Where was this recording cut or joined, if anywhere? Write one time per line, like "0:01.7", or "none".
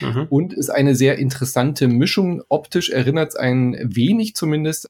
none

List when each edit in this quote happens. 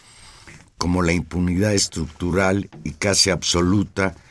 none

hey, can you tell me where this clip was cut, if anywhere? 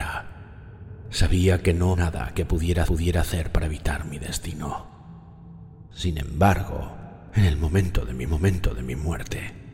0:01.9
0:02.9
0:08.3

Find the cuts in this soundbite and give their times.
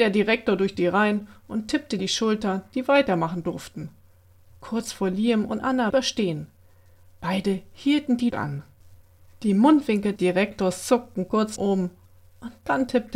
0:02.0
0:05.9
0:08.3
0:10.2
0:11.6

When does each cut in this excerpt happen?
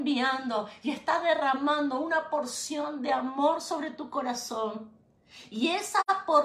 none

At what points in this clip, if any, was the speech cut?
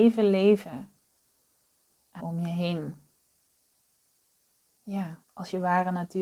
0:02.2
0:05.2

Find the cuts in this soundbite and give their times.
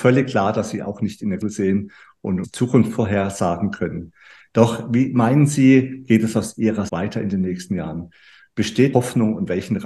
0:01.4
0:02.4
0:06.9
0:08.9

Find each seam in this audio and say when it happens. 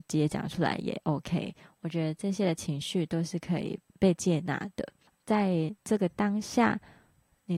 0:03.9

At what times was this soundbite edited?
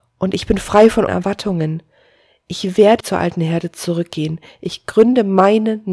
0:01.1
0:03.0

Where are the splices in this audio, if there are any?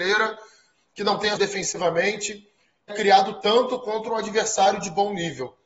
0:01.4
0:02.9

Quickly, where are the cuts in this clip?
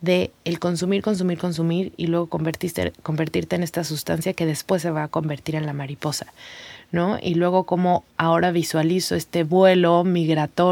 0:08.1

